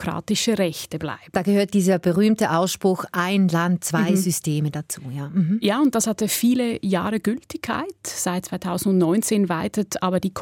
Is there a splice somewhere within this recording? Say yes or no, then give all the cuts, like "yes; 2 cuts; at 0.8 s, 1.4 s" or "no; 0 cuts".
no; 0 cuts